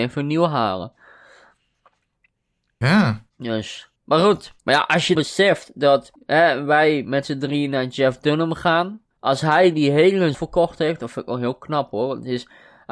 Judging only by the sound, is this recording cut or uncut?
cut